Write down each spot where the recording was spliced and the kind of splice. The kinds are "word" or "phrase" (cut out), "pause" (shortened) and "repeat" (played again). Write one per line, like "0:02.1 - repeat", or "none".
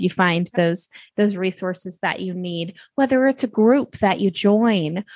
none